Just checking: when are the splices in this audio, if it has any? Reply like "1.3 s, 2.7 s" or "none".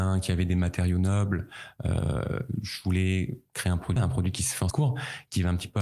4.0 s, 4.7 s